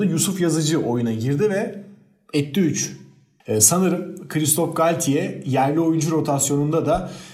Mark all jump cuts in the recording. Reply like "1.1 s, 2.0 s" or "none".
none